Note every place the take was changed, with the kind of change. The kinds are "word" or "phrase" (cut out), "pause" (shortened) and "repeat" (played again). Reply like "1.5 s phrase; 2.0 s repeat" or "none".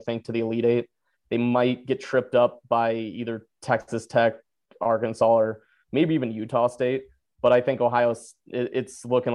none